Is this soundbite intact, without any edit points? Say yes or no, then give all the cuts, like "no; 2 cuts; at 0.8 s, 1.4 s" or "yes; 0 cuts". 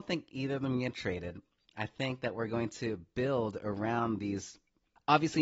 yes; 0 cuts